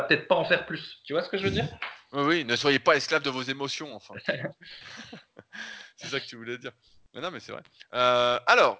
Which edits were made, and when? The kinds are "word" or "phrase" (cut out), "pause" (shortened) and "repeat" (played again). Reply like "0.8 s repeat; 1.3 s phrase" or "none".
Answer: none